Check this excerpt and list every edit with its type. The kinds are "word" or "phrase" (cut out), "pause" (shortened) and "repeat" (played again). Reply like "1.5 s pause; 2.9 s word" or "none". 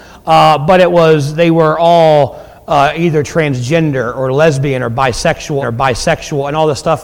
5.6 s repeat